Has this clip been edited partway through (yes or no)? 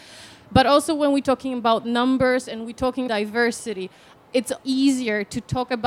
yes